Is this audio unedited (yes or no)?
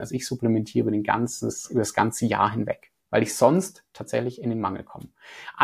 no